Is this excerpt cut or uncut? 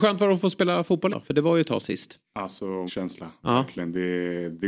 cut